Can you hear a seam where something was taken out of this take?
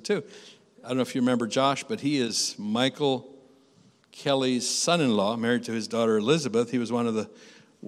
no; 0 cuts

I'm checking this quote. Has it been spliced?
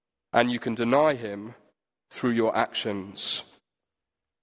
no; 0 cuts

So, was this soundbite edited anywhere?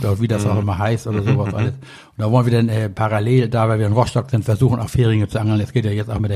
no; 0 cuts

